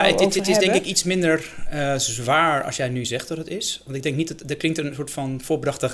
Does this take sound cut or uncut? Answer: uncut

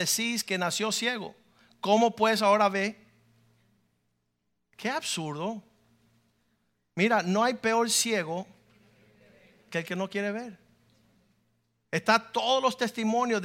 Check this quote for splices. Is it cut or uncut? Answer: uncut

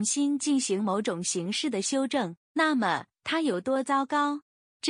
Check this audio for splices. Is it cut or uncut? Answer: cut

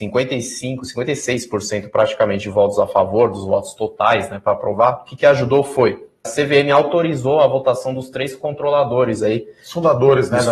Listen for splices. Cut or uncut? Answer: cut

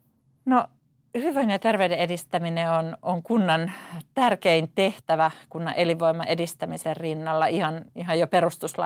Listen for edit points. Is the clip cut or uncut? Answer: uncut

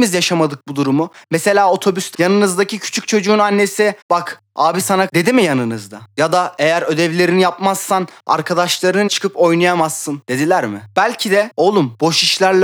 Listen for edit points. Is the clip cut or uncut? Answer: cut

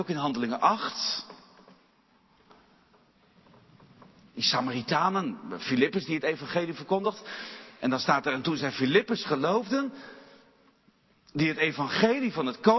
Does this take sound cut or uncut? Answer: uncut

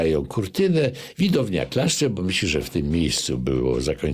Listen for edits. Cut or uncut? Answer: uncut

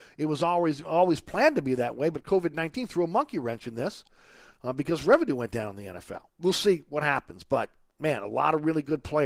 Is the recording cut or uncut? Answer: cut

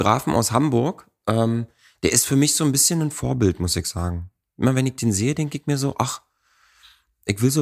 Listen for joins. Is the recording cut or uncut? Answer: uncut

